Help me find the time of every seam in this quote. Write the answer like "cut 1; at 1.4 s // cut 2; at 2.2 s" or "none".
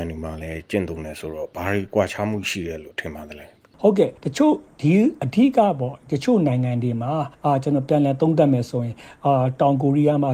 cut 1; at 4.2 s